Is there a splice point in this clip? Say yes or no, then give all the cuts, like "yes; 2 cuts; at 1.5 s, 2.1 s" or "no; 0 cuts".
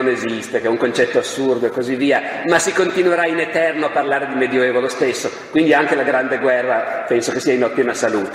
no; 0 cuts